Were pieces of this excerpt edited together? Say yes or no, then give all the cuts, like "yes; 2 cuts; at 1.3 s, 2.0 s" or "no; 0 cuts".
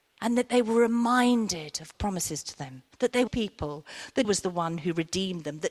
yes; 4 cuts; at 1.9 s, 2.9 s, 3.3 s, 4.2 s